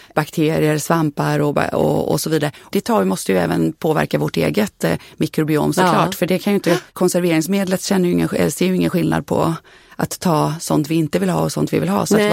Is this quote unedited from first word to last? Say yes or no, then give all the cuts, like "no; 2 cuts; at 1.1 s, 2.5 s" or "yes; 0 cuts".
no; 1 cut; at 6.9 s